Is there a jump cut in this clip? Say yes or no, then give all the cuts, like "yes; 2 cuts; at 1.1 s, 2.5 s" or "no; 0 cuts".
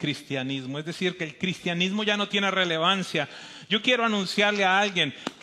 no; 0 cuts